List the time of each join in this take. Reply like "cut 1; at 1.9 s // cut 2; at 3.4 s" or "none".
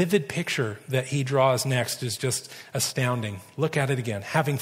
none